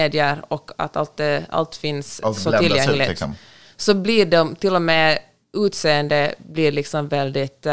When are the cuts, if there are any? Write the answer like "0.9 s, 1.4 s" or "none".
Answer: none